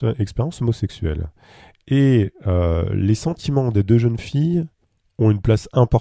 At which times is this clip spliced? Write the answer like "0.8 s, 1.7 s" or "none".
none